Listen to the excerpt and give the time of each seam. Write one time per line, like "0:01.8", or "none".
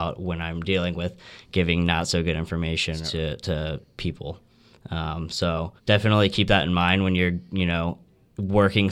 0:03.9
0:05.8